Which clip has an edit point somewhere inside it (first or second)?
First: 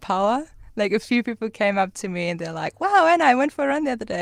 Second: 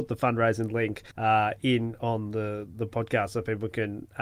second